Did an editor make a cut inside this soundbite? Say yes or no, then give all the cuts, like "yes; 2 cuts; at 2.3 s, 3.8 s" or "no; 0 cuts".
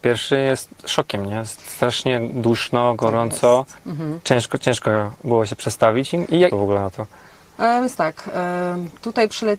yes; 2 cuts; at 3.8 s, 6.5 s